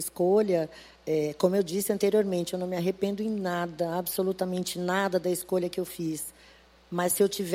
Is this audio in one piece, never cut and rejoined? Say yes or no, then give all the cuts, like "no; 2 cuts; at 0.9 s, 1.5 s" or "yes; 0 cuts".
yes; 0 cuts